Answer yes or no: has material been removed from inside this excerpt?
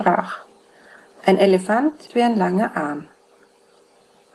yes